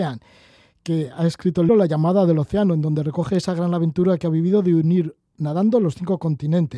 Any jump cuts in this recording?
yes; 1 cut; at 1.7 s

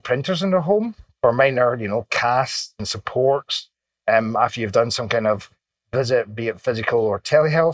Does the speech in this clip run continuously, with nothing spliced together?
yes; 0 cuts

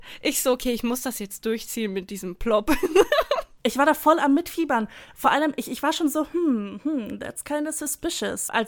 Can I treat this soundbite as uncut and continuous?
yes; 0 cuts

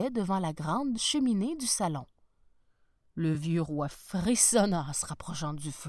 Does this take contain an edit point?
no; 0 cuts

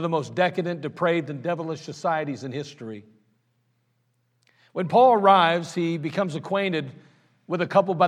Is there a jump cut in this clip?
no; 0 cuts

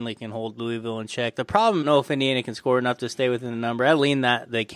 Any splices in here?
yes; 1 cut; at 1.8 s

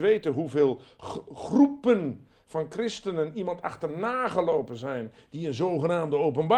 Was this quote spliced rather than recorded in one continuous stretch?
no; 0 cuts

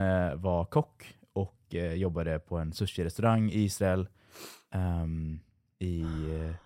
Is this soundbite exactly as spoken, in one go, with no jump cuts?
yes; 0 cuts

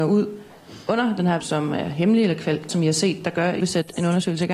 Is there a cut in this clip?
yes; 3 cuts; at 1.4 s, 2.7 s, 3.6 s

